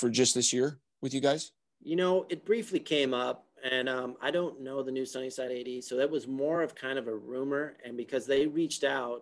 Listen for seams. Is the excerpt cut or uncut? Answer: uncut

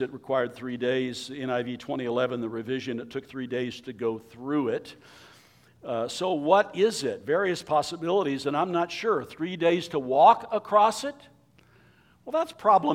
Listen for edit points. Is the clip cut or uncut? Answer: uncut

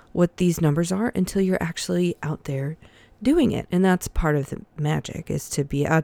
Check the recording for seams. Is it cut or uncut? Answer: uncut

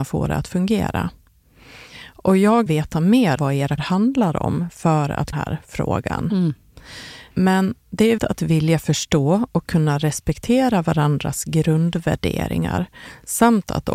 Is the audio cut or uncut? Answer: cut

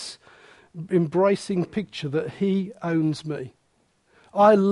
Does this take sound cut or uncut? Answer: uncut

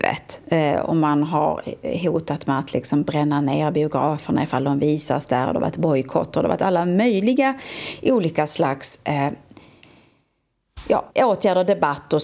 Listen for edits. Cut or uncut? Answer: cut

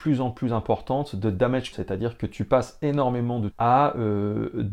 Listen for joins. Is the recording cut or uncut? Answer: cut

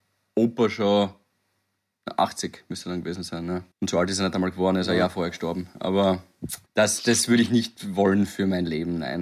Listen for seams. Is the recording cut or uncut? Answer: cut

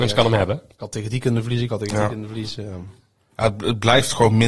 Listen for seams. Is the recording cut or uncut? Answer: uncut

